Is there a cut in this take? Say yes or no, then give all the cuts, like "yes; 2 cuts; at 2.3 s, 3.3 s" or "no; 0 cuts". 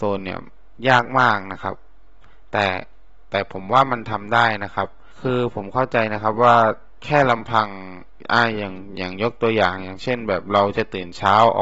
no; 0 cuts